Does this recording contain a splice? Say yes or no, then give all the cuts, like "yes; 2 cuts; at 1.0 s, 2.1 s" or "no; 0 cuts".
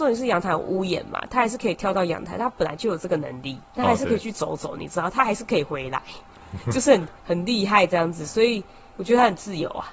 yes; 2 cuts; at 3.7 s, 7.2 s